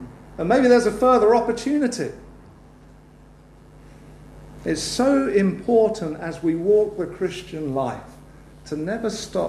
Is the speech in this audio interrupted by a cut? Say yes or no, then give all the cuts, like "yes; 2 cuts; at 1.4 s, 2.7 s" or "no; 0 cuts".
no; 0 cuts